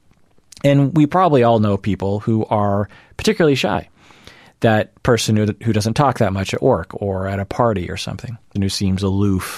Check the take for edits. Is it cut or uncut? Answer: cut